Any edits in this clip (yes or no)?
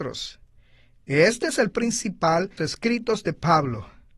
yes